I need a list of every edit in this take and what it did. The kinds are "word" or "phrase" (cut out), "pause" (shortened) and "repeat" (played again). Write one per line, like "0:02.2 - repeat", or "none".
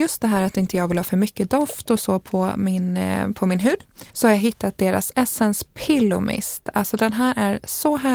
0:04.1 - pause